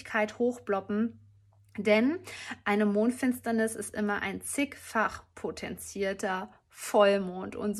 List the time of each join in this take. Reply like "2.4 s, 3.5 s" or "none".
none